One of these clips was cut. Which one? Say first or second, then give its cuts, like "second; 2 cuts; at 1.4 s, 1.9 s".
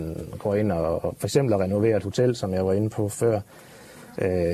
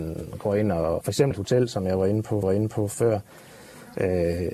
second; 3 cuts; at 1.0 s, 1.3 s, 2.4 s